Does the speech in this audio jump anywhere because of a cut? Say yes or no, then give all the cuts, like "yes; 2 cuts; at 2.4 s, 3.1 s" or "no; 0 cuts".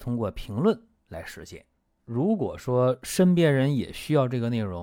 no; 0 cuts